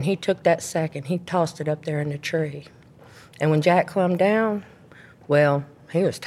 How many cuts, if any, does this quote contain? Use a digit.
0